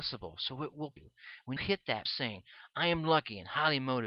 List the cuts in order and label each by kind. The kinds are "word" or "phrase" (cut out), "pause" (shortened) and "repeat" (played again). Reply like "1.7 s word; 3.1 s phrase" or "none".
1.0 s word; 1.6 s word; 2.1 s phrase